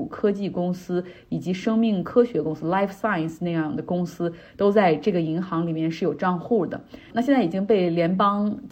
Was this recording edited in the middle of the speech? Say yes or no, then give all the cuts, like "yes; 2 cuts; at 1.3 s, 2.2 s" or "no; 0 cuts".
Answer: no; 0 cuts